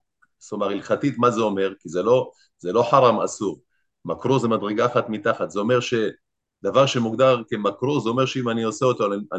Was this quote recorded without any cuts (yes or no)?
yes